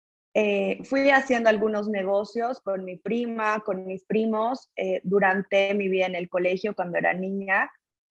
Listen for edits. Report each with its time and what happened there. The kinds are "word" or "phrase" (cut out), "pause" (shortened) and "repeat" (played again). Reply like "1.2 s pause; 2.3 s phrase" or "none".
none